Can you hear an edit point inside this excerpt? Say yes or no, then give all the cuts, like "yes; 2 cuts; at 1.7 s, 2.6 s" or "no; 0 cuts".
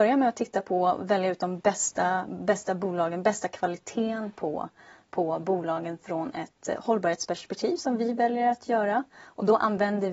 no; 0 cuts